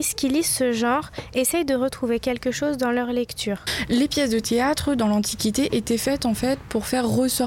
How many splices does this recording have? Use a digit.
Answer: 0